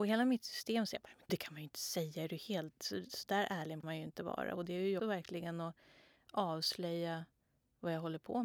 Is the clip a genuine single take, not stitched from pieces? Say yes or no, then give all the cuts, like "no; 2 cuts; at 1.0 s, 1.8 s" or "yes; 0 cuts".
no; 3 cuts; at 1.3 s, 3.8 s, 5.0 s